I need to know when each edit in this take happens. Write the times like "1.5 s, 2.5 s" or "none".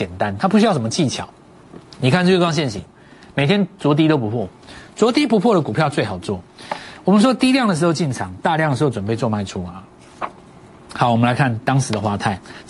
none